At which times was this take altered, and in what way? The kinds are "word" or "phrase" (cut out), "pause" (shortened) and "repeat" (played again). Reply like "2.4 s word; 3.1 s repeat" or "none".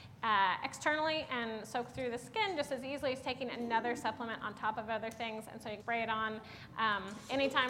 5.8 s word